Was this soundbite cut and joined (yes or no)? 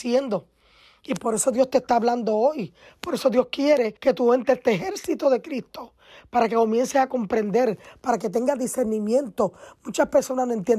yes